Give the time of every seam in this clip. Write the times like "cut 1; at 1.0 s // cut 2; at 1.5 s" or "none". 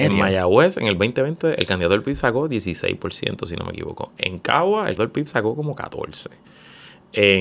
cut 1; at 5.0 s